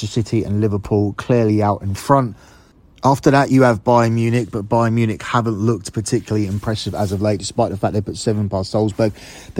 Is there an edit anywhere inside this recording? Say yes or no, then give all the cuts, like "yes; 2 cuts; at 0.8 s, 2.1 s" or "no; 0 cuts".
no; 0 cuts